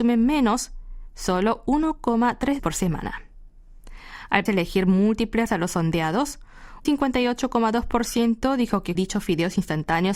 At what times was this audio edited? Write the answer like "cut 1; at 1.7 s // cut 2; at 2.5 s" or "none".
cut 1; at 2.6 s // cut 2; at 4.5 s // cut 3; at 5.5 s // cut 4; at 6.8 s // cut 5; at 8.9 s